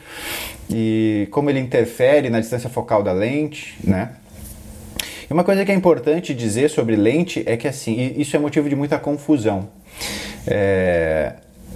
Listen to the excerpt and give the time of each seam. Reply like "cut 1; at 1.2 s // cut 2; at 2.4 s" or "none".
none